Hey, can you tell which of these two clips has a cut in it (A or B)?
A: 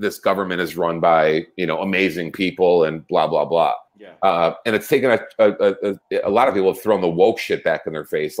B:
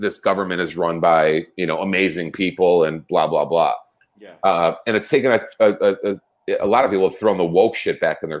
A